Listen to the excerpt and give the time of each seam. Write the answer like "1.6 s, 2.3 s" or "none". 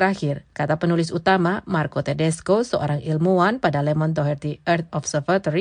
none